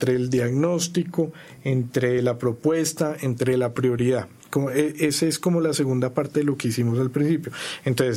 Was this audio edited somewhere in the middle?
no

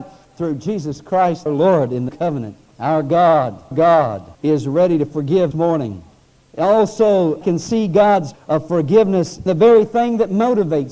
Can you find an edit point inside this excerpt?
yes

